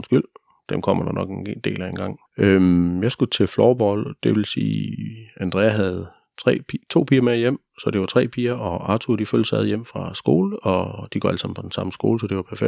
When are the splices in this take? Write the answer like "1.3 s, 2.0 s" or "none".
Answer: 2.3 s